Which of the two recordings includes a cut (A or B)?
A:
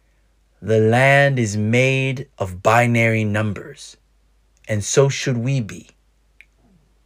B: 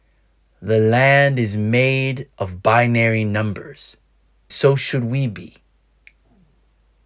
B